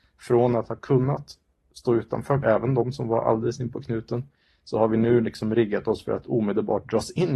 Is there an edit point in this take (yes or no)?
yes